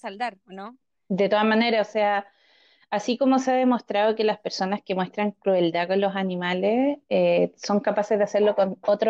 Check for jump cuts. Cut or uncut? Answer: uncut